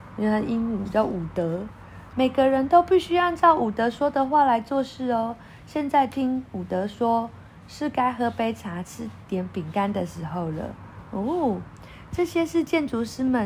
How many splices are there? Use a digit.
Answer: 1